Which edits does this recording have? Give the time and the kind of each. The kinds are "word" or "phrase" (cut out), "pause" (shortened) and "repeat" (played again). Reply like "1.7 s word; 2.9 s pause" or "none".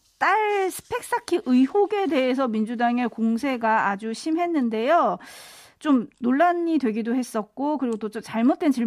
none